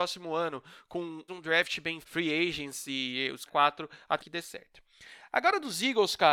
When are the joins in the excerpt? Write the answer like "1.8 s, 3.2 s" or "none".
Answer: 1.3 s, 2.0 s, 3.5 s, 4.2 s